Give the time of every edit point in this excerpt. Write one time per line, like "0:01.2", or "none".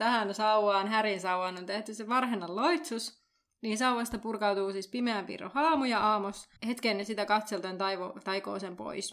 0:06.6